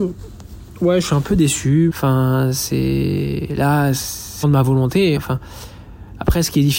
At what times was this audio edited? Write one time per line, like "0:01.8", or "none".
0:01.9
0:04.4
0:05.2